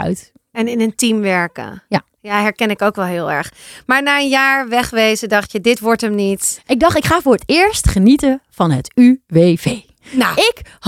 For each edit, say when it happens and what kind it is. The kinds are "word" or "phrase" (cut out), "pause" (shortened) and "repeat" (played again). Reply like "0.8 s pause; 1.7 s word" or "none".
none